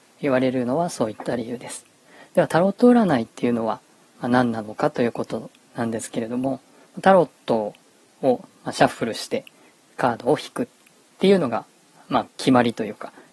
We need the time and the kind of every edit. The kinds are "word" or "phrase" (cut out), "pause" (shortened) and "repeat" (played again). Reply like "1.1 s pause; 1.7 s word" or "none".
12.3 s pause